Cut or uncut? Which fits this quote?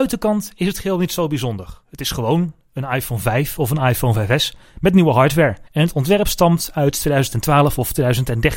cut